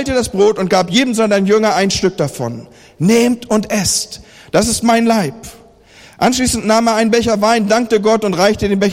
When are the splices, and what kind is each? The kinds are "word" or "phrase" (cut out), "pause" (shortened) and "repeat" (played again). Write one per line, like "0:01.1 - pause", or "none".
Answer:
none